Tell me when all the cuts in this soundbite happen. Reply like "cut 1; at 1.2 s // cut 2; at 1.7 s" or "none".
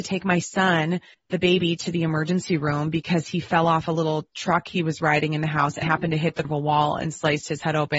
cut 1; at 1.1 s // cut 2; at 5.8 s // cut 3; at 6.4 s